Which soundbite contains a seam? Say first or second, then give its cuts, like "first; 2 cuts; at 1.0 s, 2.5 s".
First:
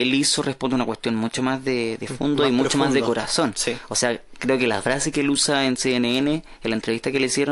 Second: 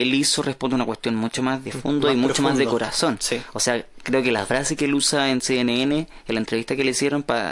second; 1 cut; at 1.6 s